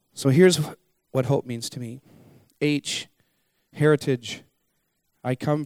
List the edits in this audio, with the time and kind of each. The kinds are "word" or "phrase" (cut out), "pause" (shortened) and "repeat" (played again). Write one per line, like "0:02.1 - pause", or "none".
none